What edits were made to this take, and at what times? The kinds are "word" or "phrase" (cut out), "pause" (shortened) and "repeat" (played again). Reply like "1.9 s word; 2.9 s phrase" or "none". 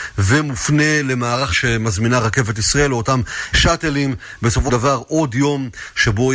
1.5 s word; 3.5 s word; 4.7 s word